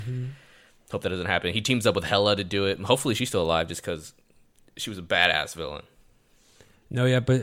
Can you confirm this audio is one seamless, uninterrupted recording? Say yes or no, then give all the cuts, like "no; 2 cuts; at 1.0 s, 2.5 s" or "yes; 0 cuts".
yes; 0 cuts